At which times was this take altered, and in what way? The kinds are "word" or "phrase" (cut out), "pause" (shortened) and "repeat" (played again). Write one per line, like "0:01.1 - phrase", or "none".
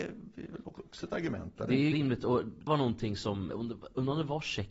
0:01.9 - word
0:02.7 - word
0:03.5 - word